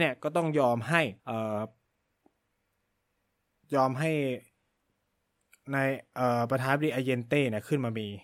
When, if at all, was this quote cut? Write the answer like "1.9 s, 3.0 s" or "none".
1.2 s

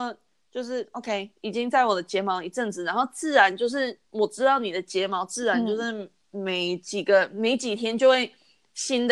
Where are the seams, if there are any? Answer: 4.0 s

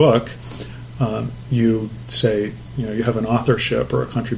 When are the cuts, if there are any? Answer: none

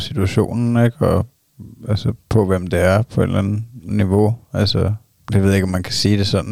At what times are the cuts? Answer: 2.2 s, 5.1 s

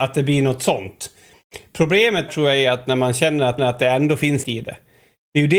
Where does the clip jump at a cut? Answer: 2.3 s, 3.6 s, 4.4 s

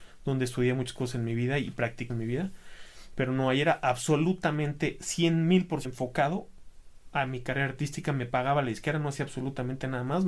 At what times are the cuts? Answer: 2.1 s, 5.8 s

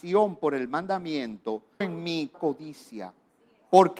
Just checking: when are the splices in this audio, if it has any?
1.8 s, 2.3 s

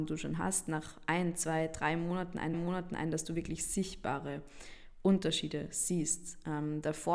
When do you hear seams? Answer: 2.5 s

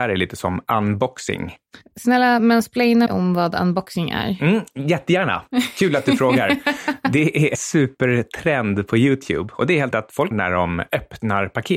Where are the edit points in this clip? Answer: 3.1 s, 7.5 s, 9.9 s, 10.3 s

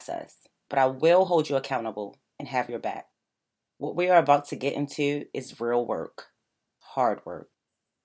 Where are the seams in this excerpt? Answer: none

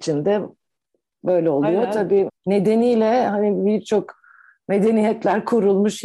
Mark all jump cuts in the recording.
2.3 s

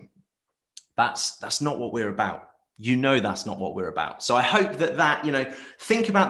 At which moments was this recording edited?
none

